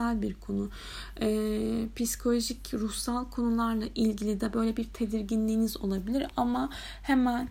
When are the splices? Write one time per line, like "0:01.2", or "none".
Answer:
none